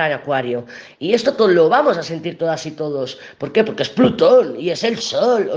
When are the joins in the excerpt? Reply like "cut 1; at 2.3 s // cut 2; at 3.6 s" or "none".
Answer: none